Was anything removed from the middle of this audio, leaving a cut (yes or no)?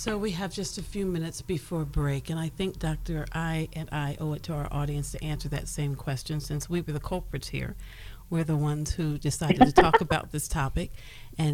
no